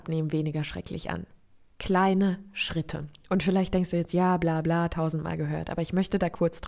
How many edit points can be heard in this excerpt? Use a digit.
0